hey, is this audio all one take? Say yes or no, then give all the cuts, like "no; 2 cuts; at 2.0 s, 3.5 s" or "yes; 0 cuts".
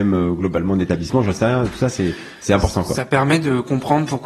yes; 0 cuts